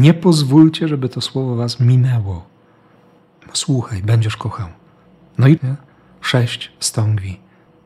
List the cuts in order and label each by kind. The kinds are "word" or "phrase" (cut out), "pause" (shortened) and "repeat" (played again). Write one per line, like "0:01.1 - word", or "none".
0:05.6 - word